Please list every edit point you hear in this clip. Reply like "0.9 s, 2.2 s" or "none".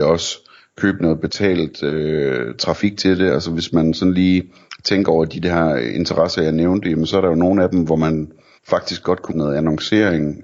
8.6 s, 9.3 s